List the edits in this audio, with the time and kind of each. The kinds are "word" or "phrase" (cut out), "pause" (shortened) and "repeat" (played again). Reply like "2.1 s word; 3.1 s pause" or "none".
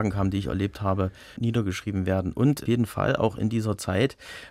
1.4 s word; 2.7 s phrase